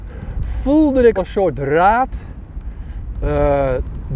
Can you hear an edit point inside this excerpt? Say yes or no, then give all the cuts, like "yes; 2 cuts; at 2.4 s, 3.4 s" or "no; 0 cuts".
yes; 1 cut; at 1.2 s